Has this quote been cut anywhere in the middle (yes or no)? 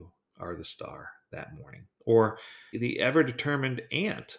yes